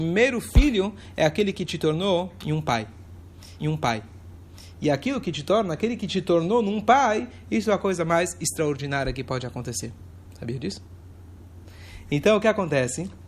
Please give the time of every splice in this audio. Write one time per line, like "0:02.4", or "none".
0:03.6